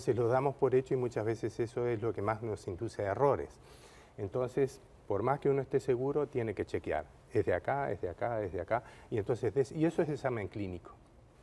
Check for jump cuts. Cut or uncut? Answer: uncut